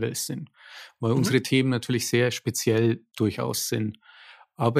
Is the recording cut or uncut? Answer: uncut